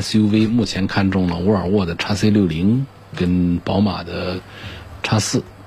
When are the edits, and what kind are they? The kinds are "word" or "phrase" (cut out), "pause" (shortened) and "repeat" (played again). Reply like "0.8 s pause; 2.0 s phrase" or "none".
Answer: none